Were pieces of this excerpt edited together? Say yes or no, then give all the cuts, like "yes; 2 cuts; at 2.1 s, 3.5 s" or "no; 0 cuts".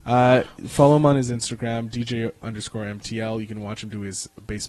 yes; 1 cut; at 2.4 s